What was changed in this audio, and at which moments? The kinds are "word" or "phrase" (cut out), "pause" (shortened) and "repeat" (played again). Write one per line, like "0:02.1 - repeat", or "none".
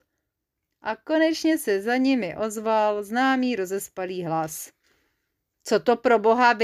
none

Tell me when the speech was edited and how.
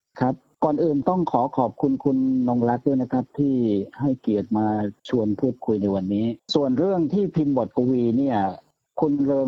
0:05.0 - pause
0:06.4 - pause

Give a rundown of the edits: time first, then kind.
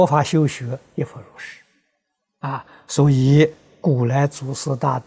none

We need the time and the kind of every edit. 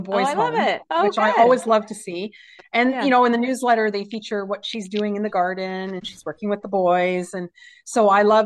none

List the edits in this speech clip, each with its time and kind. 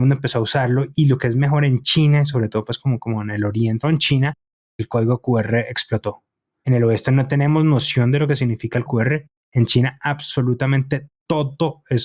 0:03.8 - phrase
0:08.9 - word

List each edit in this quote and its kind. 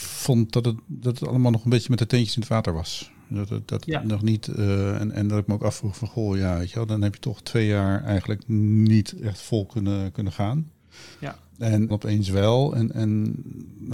0:11.1 - pause
0:11.9 - phrase

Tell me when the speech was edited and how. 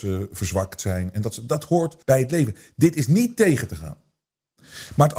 0:02.0 - pause

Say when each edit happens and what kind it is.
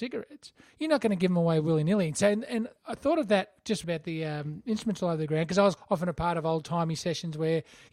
0:02.8 - pause
0:03.8 - phrase
0:05.8 - word

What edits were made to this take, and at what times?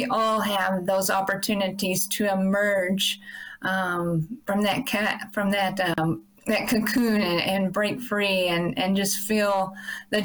none

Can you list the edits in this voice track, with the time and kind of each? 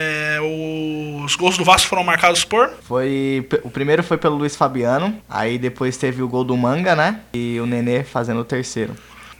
0:05.2 - pause

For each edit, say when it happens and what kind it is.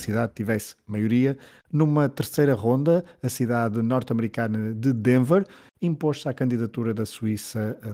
none

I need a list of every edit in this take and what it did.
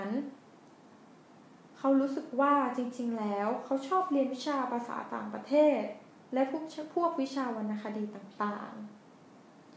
0:01.7 - pause

